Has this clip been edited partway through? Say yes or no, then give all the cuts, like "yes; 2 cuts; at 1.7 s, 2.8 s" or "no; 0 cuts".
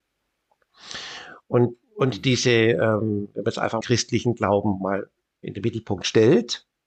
yes; 2 cuts; at 3.8 s, 5.4 s